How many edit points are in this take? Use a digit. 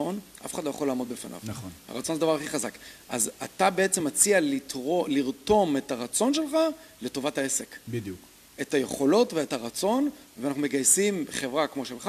0